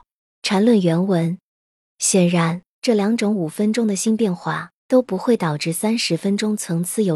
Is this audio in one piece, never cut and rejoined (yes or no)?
yes